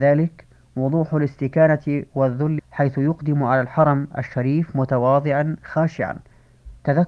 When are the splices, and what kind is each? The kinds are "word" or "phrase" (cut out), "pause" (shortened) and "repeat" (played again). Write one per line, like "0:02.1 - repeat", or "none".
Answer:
0:02.6 - word